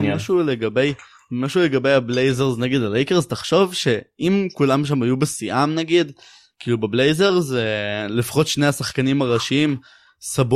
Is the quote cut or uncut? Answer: uncut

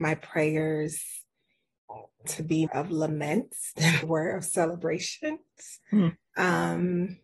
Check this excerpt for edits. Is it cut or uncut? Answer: cut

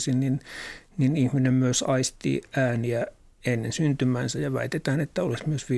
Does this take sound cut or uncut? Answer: uncut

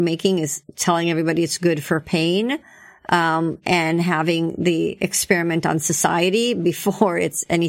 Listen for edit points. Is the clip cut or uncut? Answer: uncut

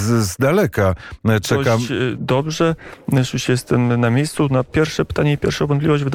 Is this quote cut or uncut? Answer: cut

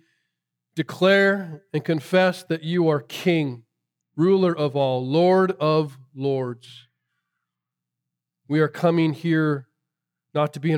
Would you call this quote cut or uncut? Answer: uncut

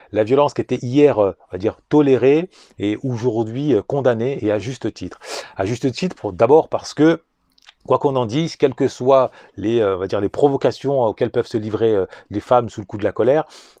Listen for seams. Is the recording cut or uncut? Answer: uncut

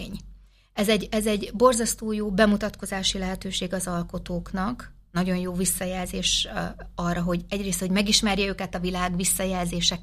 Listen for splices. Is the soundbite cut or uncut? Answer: uncut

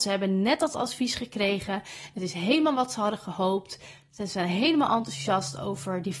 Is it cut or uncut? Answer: uncut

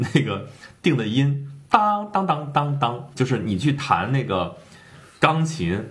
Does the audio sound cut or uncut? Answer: cut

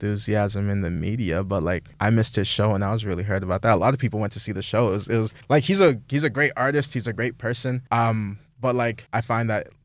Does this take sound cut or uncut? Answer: uncut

